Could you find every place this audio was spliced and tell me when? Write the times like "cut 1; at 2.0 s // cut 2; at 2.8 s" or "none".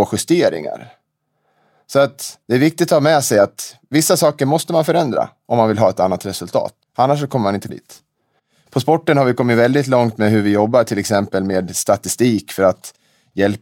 cut 1; at 2.4 s // cut 2; at 6.8 s // cut 3; at 7.7 s